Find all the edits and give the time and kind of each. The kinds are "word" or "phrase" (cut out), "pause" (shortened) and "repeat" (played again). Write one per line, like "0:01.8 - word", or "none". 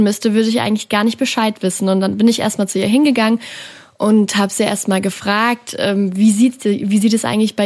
none